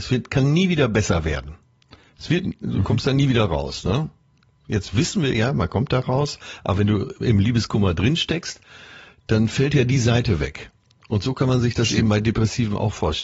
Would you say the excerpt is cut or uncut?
uncut